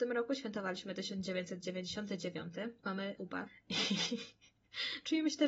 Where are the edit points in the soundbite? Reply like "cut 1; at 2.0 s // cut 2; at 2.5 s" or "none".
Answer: cut 1; at 3.2 s

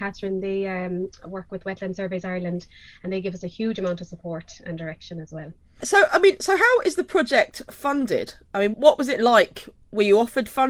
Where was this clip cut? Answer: cut 1; at 8.7 s

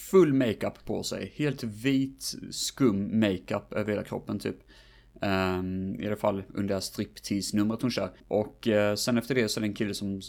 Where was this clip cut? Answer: cut 1; at 8.2 s

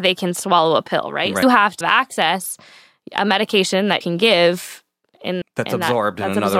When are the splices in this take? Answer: cut 1; at 1.4 s // cut 2; at 1.8 s // cut 3; at 4.0 s // cut 4; at 5.4 s

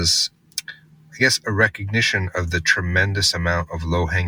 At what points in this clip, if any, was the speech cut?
none

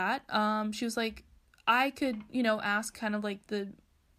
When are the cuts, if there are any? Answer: none

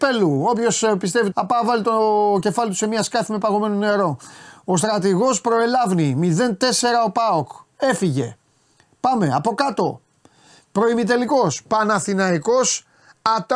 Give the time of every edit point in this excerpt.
cut 1; at 1.3 s

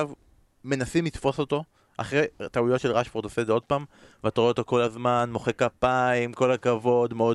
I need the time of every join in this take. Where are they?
none

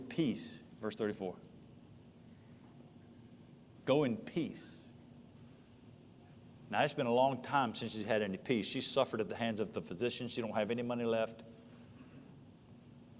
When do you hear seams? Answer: none

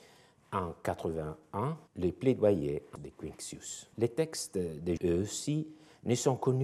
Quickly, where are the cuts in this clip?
cut 1; at 1.9 s // cut 2; at 3.0 s // cut 3; at 3.9 s // cut 4; at 5.0 s

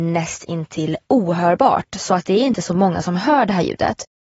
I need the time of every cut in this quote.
none

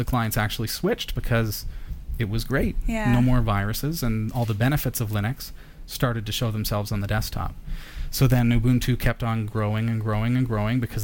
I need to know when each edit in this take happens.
none

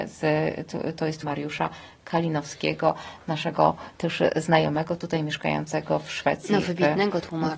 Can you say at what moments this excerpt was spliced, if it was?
cut 1; at 1.2 s

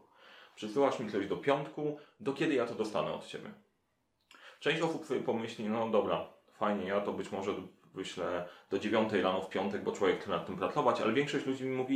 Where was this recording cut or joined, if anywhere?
none

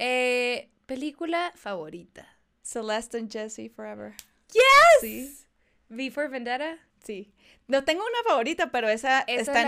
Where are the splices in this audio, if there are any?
none

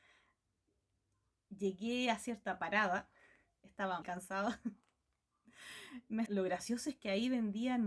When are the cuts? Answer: cut 1; at 2.6 s // cut 2; at 4.0 s // cut 3; at 6.3 s

